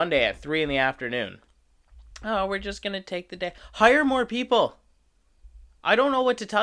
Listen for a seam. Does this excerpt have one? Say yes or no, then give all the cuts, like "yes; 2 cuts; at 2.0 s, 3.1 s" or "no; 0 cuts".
no; 0 cuts